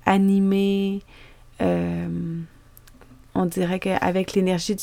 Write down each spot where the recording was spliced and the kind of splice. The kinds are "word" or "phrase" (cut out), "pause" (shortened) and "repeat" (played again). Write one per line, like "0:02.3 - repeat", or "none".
none